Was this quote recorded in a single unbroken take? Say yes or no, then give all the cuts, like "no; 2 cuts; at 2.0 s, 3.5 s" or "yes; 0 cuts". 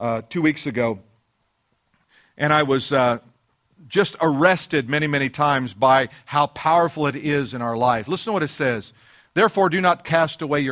yes; 0 cuts